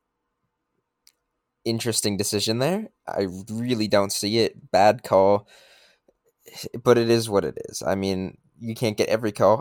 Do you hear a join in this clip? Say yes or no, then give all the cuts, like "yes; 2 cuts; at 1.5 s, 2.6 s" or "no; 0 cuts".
no; 0 cuts